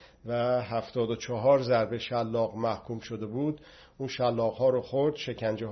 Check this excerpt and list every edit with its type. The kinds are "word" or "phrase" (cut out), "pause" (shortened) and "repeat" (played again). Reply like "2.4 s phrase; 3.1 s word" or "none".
none